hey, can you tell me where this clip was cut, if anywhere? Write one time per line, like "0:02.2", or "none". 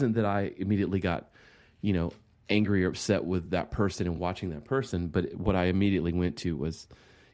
none